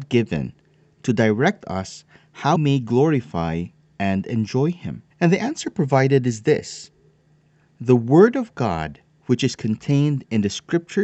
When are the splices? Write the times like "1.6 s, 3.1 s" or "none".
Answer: 2.6 s, 5.1 s